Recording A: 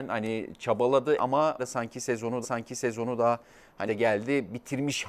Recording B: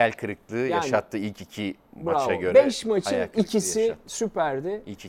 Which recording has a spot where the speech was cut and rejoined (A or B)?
A